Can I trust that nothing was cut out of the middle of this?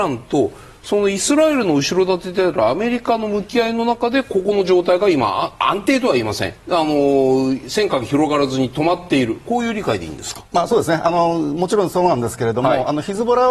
no; 2 cuts; at 6.6 s, 10.5 s

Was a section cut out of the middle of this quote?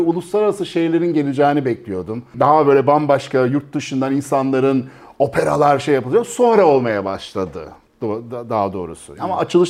no; 0 cuts

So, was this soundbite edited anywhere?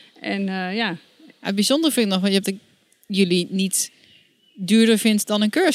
yes; 1 cut; at 2.4 s

